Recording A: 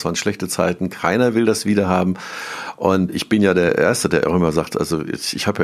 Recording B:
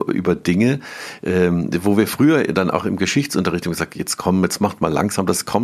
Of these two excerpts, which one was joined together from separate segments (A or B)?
A